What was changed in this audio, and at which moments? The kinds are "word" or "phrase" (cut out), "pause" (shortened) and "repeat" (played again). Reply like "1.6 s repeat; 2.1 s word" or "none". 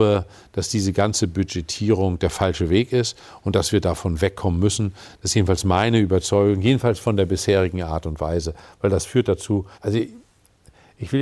9.7 s pause